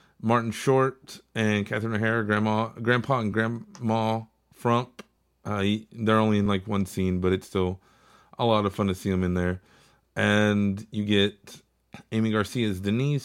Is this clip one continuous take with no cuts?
yes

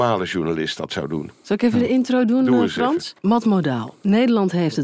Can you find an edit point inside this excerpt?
yes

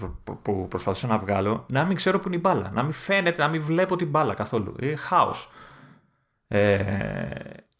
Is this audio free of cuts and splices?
yes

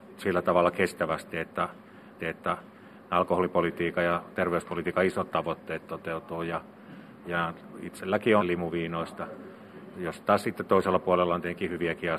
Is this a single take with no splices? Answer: no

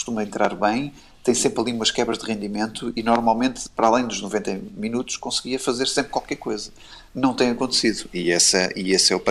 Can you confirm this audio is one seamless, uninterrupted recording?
yes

